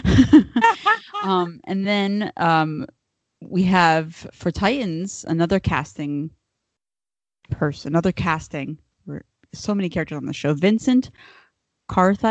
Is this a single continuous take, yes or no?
yes